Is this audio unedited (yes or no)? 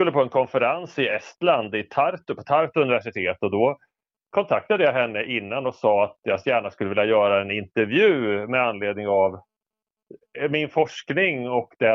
yes